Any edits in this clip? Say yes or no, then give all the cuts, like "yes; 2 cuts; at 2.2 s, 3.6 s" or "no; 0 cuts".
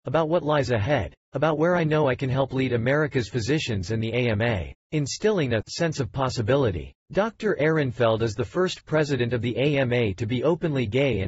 yes; 2 cuts; at 4.8 s, 7.0 s